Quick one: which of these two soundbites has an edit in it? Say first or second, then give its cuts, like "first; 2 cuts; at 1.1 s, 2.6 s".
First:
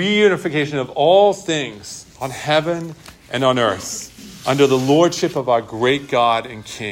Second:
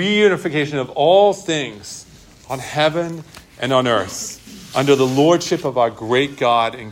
first; 1 cut; at 2.1 s